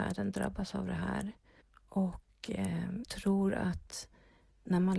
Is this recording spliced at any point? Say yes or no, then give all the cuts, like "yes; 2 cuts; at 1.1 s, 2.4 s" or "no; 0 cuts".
yes; 2 cuts; at 1.6 s, 3.0 s